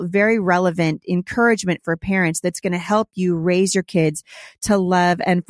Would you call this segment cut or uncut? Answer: uncut